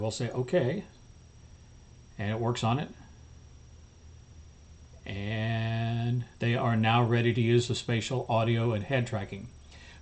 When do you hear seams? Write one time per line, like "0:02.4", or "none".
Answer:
0:06.3